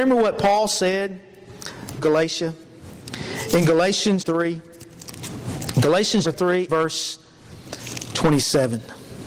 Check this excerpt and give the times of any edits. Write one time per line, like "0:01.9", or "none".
0:02.0
0:04.2
0:06.2
0:06.7